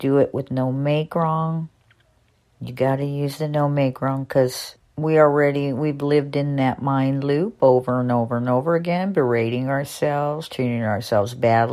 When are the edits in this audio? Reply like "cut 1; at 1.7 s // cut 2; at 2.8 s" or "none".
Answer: none